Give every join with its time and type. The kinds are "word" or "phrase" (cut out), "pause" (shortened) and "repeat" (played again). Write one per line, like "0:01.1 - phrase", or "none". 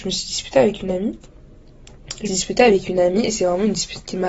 0:02.3 - word